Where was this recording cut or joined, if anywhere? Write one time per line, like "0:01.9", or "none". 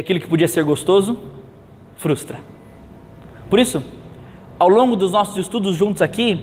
none